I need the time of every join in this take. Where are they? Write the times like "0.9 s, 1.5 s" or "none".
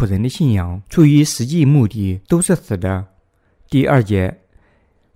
none